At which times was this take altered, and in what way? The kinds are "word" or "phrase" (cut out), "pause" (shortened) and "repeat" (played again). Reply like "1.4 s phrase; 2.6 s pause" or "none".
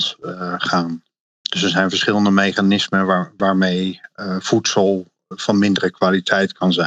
none